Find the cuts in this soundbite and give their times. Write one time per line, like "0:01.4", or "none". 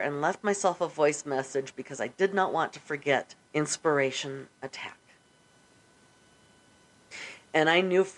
0:03.4